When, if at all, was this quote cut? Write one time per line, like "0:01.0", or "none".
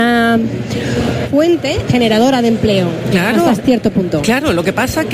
0:01.2
0:01.9
0:03.1
0:03.6